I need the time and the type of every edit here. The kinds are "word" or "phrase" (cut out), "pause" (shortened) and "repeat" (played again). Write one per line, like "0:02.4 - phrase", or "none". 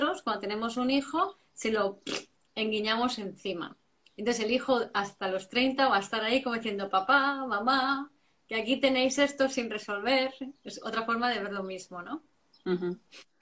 none